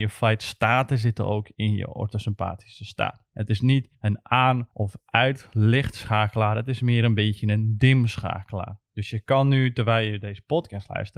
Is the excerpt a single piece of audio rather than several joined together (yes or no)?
no